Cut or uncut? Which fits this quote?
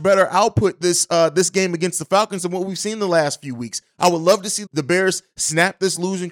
cut